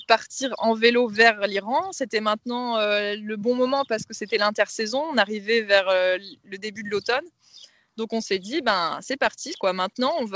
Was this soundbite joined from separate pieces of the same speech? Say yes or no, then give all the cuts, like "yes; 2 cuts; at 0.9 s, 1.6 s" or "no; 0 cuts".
no; 0 cuts